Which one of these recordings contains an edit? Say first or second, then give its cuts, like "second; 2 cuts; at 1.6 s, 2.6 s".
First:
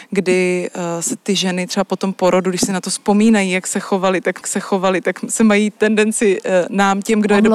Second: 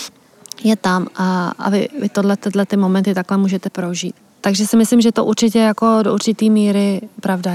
first; 1 cut; at 4.4 s